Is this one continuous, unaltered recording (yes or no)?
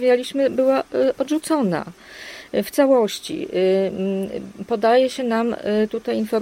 yes